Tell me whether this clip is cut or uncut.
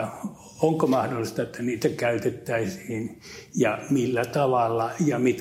uncut